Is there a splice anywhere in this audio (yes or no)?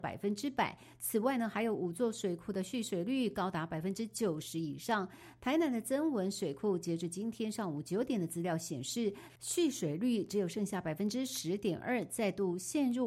yes